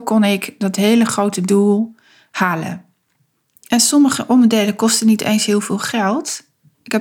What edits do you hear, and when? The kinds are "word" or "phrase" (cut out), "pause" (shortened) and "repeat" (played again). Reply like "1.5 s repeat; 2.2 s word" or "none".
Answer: none